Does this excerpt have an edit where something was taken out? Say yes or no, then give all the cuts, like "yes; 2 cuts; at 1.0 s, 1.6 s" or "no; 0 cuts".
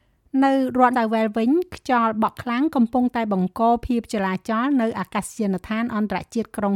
yes; 1 cut; at 0.9 s